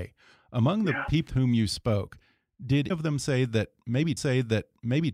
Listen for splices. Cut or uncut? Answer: cut